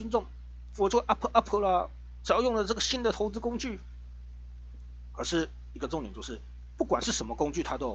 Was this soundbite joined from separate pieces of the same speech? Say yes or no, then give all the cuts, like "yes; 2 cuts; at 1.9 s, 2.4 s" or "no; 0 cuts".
no; 0 cuts